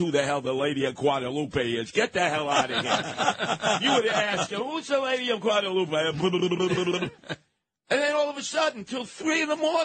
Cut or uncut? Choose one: uncut